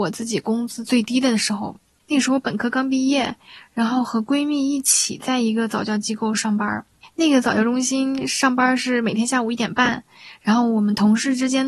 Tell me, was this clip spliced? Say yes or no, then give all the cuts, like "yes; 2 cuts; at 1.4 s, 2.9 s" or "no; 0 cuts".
no; 0 cuts